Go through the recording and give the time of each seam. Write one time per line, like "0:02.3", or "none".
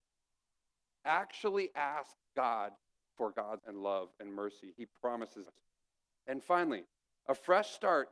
0:03.6
0:05.5